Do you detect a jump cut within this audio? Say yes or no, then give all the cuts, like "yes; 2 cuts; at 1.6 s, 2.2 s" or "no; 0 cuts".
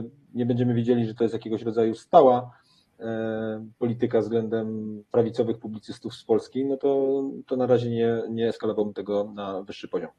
no; 0 cuts